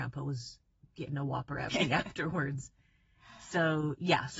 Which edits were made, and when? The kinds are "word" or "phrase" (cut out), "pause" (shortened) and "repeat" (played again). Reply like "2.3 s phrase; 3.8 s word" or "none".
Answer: 1.7 s word